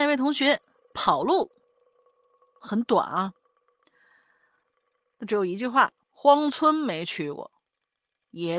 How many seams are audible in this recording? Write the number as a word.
one